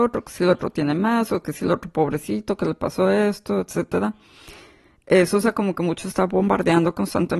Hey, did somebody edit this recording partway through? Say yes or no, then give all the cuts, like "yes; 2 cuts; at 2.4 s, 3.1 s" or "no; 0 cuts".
no; 0 cuts